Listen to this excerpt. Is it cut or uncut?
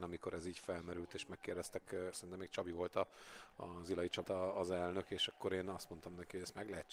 cut